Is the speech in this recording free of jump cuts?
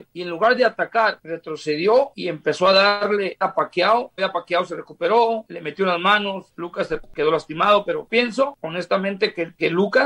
no; 3 cuts; at 3.4 s, 4.2 s, 8.1 s

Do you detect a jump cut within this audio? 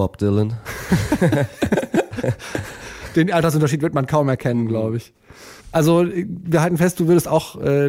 yes; 1 cut; at 5.6 s

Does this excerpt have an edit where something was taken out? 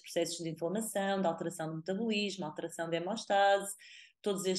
no; 0 cuts

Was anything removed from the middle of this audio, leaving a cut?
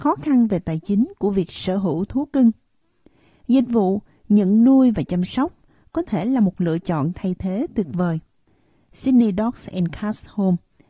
no; 0 cuts

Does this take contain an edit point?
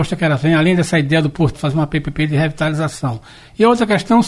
yes; 1 cut; at 1.5 s

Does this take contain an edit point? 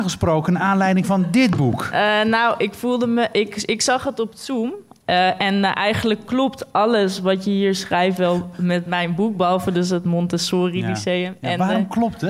no; 0 cuts

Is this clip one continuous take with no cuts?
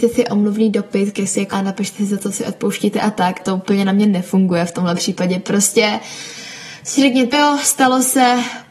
no; 3 cuts; at 1.5 s, 3.4 s, 7.3 s

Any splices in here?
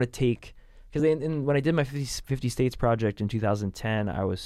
no; 0 cuts

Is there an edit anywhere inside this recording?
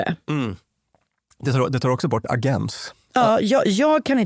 no; 0 cuts

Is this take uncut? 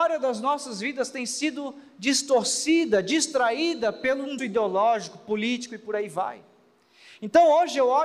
no; 1 cut; at 4.4 s

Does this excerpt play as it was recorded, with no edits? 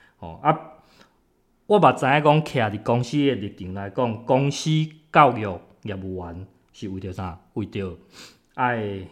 yes; 0 cuts

